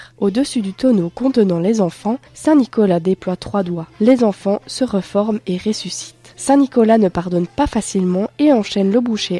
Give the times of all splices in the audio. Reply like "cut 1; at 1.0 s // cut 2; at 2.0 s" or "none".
cut 1; at 2.3 s